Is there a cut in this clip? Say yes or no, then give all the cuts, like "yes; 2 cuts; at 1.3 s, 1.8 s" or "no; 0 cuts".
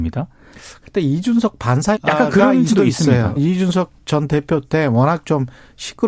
yes; 4 cuts; at 1.9 s, 2.7 s, 3.4 s, 4.0 s